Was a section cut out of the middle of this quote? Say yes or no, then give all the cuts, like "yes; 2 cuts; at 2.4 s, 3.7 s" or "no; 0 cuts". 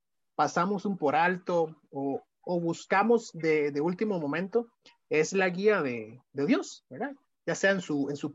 yes; 1 cut; at 1.0 s